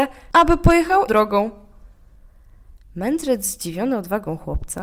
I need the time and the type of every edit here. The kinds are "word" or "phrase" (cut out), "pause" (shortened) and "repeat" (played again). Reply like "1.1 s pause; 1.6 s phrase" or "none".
1.1 s word